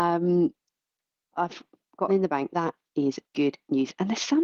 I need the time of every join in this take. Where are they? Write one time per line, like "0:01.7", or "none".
0:01.3
0:02.1
0:02.5
0:03.2